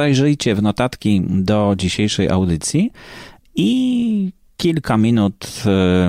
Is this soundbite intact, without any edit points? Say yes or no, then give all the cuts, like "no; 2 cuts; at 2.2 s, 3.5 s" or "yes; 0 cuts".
yes; 0 cuts